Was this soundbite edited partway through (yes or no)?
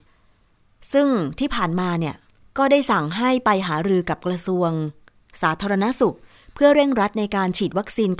no